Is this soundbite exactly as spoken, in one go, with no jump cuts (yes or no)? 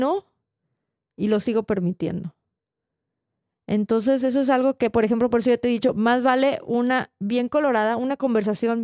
yes